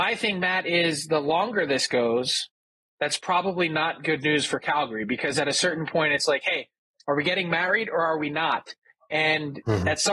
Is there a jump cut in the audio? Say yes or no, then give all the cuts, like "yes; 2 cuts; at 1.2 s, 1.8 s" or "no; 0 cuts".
no; 0 cuts